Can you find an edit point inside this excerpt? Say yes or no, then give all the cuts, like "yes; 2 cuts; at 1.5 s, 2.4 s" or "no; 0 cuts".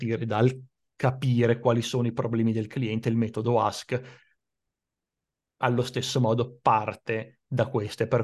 no; 0 cuts